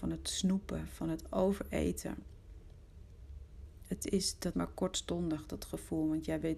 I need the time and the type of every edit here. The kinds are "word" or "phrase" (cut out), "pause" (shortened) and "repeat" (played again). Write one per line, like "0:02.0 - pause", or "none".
0:04.5 - word

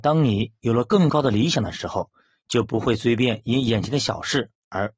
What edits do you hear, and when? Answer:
none

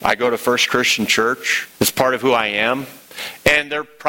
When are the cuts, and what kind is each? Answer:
0:01.7 - pause

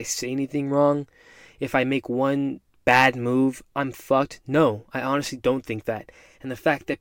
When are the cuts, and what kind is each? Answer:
none

